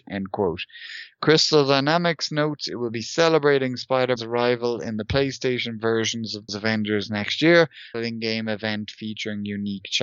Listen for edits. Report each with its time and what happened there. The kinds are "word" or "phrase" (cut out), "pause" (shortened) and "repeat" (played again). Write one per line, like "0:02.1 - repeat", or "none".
0:04.2 - word
0:06.5 - word
0:07.9 - phrase